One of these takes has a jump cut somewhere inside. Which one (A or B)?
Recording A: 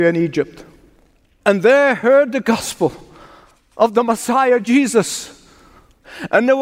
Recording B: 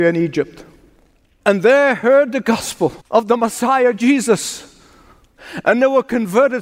B